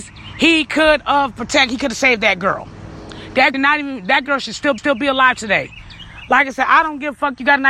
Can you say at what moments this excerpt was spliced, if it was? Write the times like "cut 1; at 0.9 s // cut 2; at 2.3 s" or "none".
cut 1; at 3.5 s // cut 2; at 4.8 s